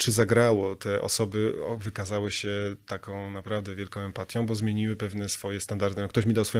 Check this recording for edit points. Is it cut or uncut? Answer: uncut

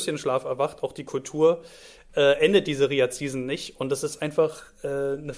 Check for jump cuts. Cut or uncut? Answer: uncut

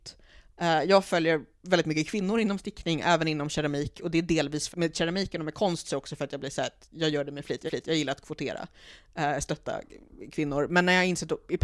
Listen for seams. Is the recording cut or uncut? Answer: cut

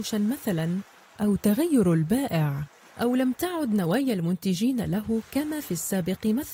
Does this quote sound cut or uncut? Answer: uncut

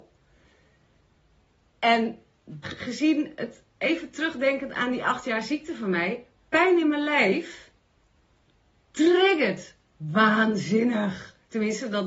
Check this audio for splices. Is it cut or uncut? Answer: cut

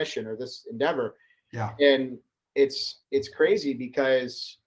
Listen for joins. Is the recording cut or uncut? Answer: uncut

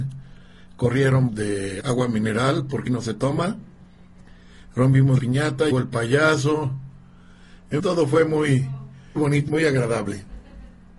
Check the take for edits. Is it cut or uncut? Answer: cut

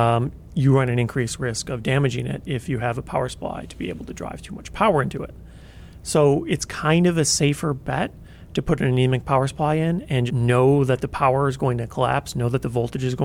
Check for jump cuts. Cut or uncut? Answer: cut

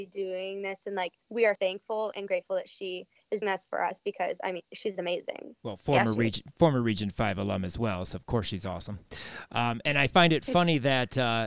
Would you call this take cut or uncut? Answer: cut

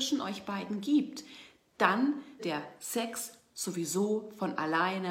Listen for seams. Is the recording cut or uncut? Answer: cut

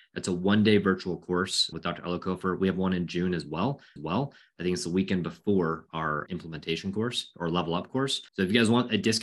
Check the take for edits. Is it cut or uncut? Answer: cut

